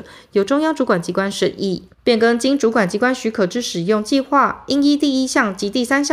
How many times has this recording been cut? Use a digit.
1